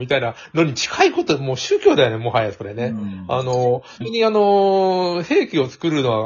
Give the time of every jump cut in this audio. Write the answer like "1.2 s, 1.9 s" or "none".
4.0 s